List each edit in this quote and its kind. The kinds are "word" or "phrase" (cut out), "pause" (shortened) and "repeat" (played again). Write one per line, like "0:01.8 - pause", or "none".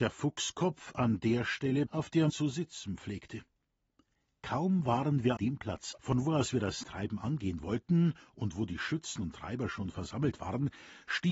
0:01.9 - word
0:02.3 - word
0:05.4 - word
0:06.0 - word
0:06.8 - word